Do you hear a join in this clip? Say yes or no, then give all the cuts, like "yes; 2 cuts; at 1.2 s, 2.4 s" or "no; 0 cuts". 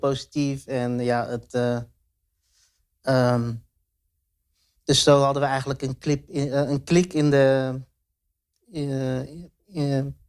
no; 0 cuts